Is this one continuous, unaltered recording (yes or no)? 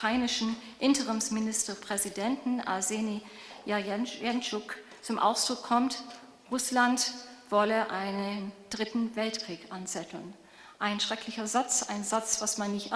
yes